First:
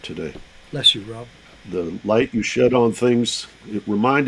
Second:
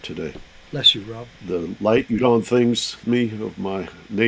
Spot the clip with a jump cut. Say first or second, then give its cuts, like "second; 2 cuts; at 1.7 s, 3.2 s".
second; 3 cuts; at 1.4 s, 2.2 s, 3.0 s